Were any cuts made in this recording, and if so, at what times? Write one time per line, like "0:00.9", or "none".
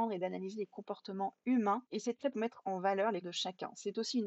0:02.3
0:03.2